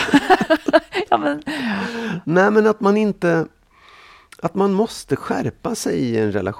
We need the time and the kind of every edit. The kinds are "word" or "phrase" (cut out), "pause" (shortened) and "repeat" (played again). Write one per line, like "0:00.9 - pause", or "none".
none